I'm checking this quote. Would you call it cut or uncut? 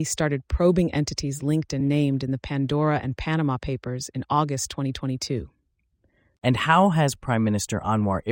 uncut